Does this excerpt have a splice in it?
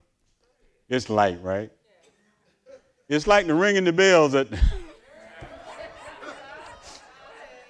no; 0 cuts

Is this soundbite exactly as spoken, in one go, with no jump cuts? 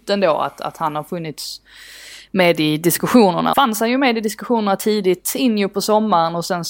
no; 1 cut; at 3.5 s

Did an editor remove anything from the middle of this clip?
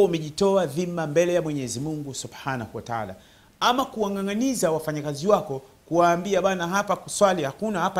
no; 0 cuts

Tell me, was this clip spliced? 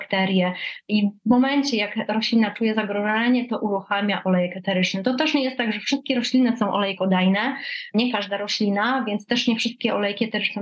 no; 0 cuts

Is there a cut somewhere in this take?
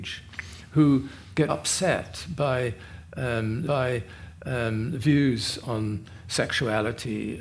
yes; 2 cuts; at 1.5 s, 3.7 s

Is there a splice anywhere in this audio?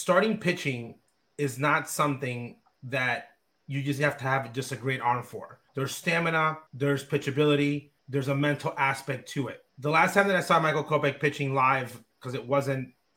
yes; 4 cuts; at 5.7 s, 6.7 s, 8.0 s, 9.7 s

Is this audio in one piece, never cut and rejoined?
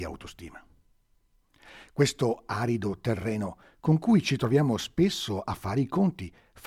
yes; 0 cuts

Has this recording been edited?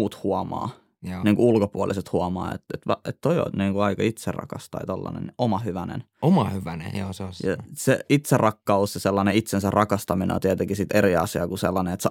no; 0 cuts

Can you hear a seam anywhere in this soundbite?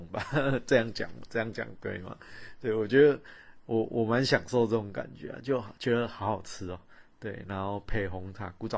no; 0 cuts

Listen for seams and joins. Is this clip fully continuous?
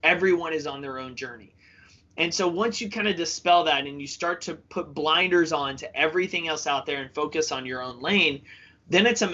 yes; 0 cuts

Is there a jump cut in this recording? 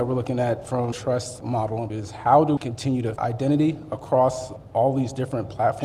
yes; 4 cuts; at 0.9 s, 1.9 s, 2.6 s, 3.2 s

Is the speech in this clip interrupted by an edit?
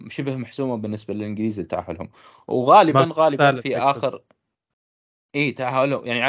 no; 0 cuts

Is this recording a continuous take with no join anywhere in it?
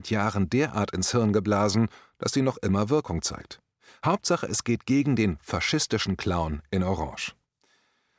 yes; 0 cuts

